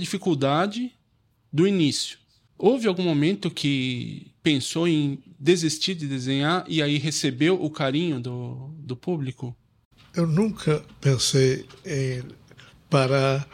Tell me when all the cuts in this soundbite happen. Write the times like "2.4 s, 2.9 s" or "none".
none